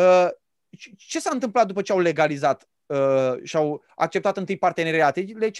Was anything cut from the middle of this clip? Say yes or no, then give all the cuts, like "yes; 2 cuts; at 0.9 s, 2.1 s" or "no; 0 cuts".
no; 0 cuts